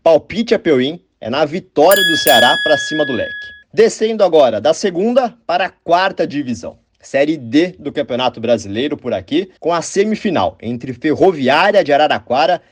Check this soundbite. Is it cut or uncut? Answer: cut